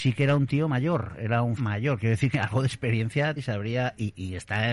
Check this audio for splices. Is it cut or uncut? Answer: cut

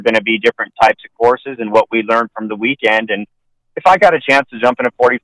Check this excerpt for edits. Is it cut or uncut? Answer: uncut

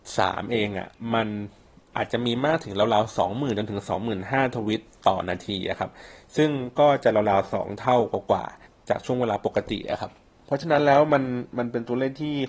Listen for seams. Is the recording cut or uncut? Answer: cut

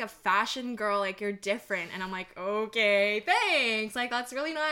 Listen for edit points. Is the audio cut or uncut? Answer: uncut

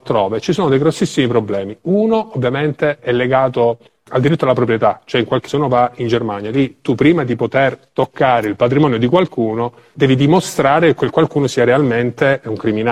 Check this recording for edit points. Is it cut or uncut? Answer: cut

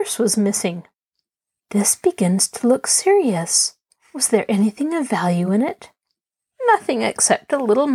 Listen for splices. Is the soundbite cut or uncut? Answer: uncut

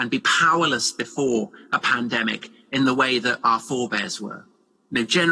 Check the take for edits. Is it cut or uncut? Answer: uncut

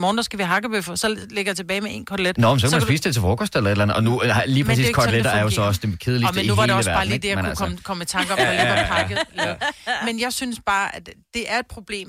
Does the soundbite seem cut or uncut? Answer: uncut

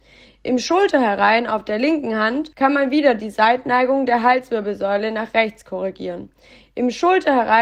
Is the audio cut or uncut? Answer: cut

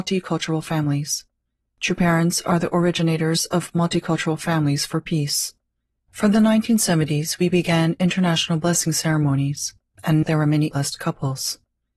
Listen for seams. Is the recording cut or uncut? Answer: cut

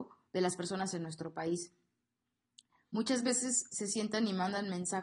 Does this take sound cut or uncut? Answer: uncut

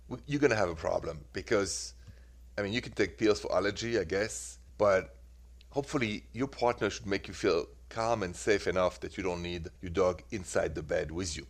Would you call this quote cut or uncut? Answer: cut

